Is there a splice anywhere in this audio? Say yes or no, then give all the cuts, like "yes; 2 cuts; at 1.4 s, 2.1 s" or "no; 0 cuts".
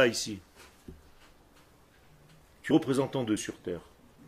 yes; 2 cuts; at 2.7 s, 3.4 s